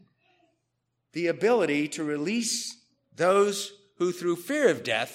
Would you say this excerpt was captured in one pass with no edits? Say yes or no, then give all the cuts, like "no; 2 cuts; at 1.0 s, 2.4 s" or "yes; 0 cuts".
yes; 0 cuts